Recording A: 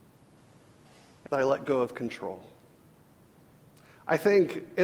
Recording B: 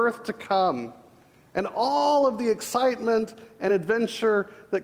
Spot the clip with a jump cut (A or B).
A